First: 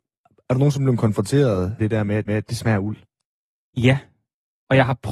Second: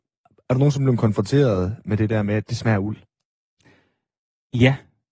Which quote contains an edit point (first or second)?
first